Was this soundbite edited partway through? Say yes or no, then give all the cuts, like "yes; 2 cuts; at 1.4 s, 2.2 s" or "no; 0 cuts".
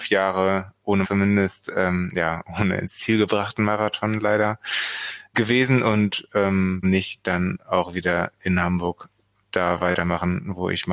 yes; 3 cuts; at 1.0 s, 5.3 s, 6.8 s